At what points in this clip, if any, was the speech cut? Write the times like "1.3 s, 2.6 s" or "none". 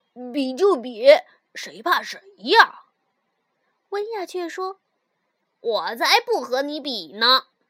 none